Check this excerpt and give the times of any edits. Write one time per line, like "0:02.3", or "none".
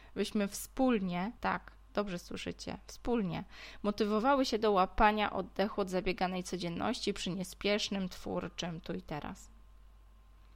0:01.4